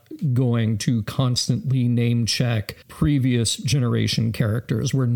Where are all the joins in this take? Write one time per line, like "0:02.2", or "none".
0:02.8